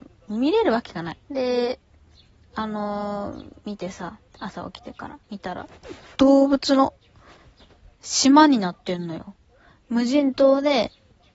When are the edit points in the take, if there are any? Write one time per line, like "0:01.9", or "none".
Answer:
0:01.2
0:04.3
0:05.2